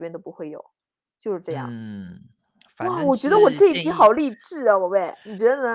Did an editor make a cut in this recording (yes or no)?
no